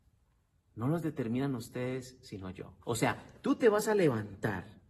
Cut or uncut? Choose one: cut